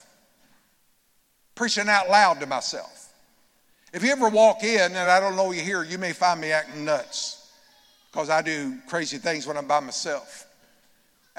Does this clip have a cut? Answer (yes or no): no